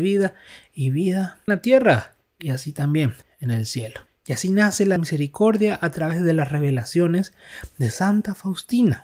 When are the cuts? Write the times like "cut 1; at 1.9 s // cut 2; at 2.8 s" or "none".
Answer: cut 1; at 1.5 s // cut 2; at 2.2 s // cut 3; at 3.2 s // cut 4; at 4.1 s // cut 5; at 5.0 s